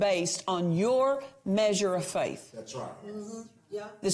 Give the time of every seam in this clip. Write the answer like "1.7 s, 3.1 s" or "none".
none

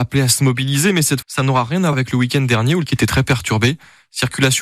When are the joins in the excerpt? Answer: 1.2 s, 1.9 s, 2.9 s

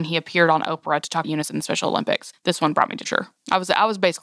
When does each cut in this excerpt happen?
1.2 s, 3.0 s

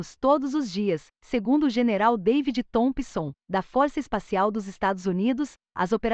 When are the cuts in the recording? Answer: 1.1 s

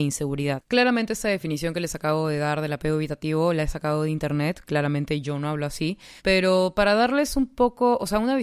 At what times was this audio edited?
6.2 s

